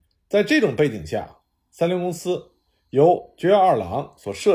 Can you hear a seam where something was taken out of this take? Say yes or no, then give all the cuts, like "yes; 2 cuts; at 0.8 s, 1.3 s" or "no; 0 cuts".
no; 0 cuts